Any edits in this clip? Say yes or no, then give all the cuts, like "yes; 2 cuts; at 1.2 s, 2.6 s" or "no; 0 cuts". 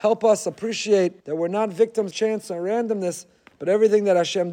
yes; 2 cuts; at 1.2 s, 2.1 s